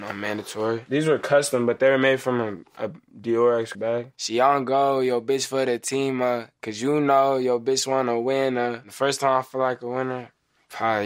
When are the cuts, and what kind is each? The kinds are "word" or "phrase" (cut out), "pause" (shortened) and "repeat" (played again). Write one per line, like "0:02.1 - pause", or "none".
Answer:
0:03.7 - word